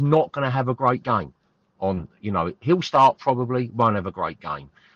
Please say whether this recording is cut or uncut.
uncut